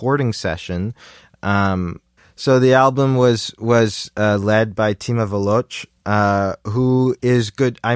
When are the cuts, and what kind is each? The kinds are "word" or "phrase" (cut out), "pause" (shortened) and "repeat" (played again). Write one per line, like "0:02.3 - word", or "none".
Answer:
none